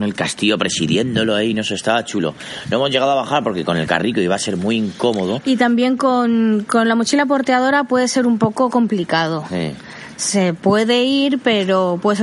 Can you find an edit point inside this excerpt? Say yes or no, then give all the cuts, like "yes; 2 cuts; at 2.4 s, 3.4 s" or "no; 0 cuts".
no; 0 cuts